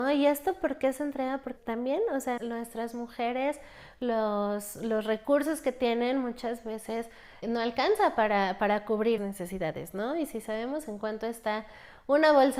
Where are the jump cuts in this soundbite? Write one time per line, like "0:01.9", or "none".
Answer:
0:01.6
0:02.4
0:07.4
0:09.2